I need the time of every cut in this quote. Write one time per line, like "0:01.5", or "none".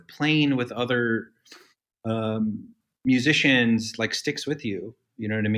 none